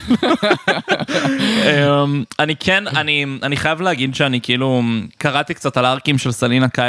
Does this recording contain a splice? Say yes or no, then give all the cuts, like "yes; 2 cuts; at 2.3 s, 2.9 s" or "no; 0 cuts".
no; 0 cuts